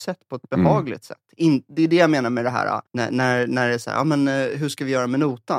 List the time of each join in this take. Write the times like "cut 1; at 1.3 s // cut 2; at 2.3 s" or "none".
cut 1; at 2.9 s